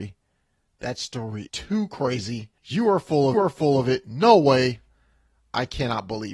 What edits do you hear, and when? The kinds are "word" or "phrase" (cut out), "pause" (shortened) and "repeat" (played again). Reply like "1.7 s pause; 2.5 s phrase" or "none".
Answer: 1.5 s word; 2.6 s pause; 3.3 s repeat